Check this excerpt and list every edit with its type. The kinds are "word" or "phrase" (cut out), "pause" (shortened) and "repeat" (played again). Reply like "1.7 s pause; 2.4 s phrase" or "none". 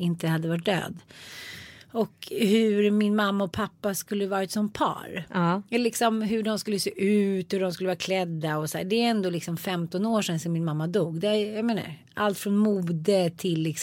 none